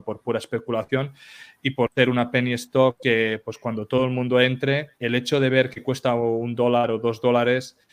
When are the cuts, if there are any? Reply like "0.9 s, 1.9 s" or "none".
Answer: 5.0 s